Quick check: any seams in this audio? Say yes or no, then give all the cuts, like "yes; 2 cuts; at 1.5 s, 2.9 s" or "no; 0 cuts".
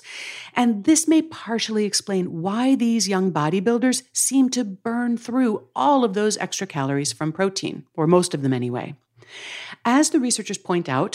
no; 0 cuts